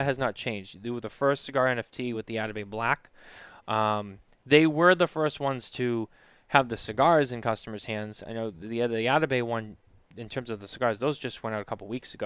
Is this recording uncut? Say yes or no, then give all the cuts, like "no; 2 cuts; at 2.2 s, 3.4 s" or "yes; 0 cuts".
yes; 0 cuts